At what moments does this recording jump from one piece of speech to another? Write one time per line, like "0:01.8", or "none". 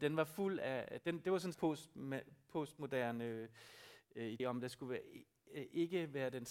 0:01.5
0:04.4